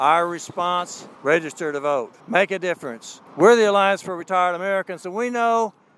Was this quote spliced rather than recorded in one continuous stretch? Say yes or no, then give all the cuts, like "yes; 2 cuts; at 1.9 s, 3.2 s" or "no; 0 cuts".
yes; 3 cuts; at 1.2 s, 2.2 s, 3.3 s